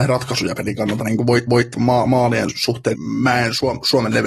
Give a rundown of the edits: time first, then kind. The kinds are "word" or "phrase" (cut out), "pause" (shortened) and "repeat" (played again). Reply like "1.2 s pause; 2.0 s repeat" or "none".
1.5 s repeat; 2.9 s word